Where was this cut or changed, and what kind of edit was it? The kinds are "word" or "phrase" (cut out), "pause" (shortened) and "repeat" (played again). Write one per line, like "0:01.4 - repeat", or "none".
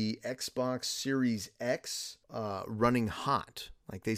0:02.2 - pause